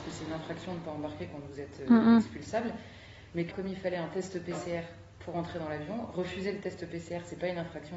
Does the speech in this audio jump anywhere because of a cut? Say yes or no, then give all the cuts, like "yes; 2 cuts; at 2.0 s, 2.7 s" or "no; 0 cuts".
yes; 1 cut; at 3.5 s